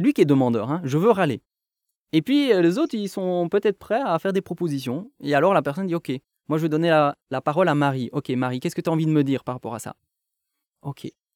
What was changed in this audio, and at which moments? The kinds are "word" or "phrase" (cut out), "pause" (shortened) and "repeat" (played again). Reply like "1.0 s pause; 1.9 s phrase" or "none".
7.2 s pause